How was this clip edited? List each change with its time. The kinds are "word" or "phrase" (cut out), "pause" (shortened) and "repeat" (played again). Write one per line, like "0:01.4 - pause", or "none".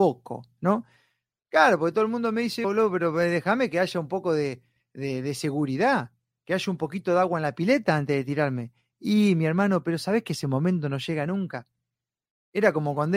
0:02.6 - word